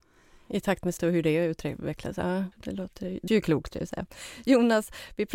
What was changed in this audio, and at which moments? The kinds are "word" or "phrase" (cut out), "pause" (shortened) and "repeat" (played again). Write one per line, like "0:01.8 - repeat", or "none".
0:01.0 - word
0:02.5 - word
0:03.3 - word
0:03.7 - word